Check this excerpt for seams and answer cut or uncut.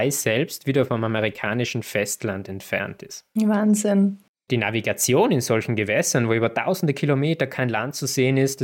uncut